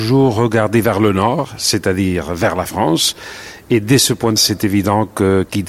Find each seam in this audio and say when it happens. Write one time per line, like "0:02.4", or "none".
0:04.4